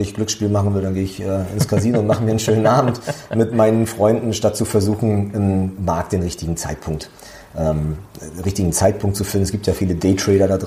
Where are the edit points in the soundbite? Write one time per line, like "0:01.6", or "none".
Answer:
none